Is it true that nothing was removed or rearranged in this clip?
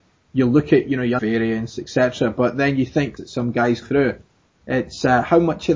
no; 3 cuts; at 1.2 s, 3.2 s, 3.8 s

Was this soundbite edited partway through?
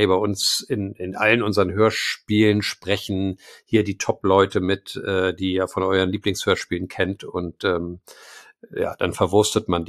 no; 0 cuts

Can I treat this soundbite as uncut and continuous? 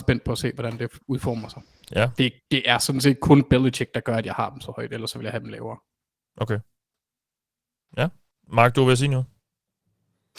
yes; 0 cuts

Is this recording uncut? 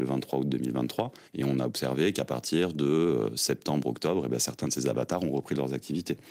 no; 1 cut; at 1.3 s

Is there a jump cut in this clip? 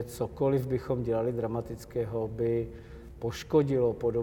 no; 0 cuts

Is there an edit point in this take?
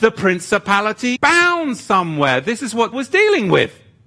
yes; 2 cuts; at 1.2 s, 2.9 s

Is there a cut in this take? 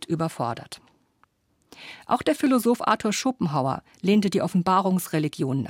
no; 0 cuts

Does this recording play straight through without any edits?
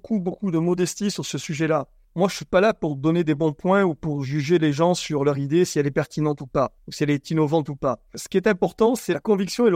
yes; 0 cuts

